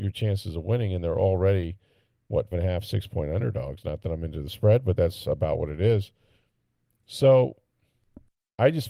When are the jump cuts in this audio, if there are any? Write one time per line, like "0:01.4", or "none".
0:02.5